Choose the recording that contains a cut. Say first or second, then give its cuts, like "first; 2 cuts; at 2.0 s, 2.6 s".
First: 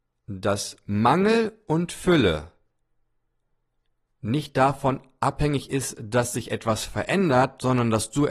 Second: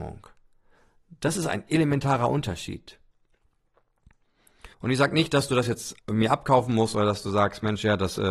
second; 2 cuts; at 4.7 s, 6.0 s